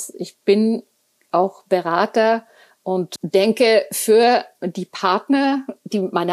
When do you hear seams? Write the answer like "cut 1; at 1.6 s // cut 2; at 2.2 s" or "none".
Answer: none

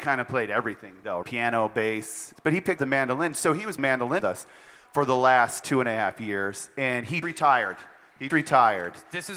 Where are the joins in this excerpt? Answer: cut 1; at 1.2 s // cut 2; at 2.3 s // cut 3; at 2.8 s // cut 4; at 3.8 s // cut 5; at 4.2 s // cut 6; at 5.6 s // cut 7; at 7.2 s // cut 8; at 8.3 s

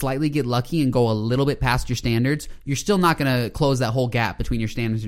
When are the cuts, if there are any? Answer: none

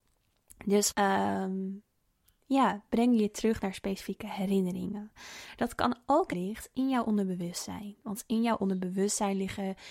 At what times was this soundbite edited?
cut 1; at 0.9 s // cut 2; at 6.3 s

